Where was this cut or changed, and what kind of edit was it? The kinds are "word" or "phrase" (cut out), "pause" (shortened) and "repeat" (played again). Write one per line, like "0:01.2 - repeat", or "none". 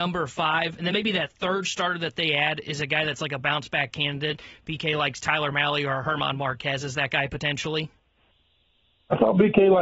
none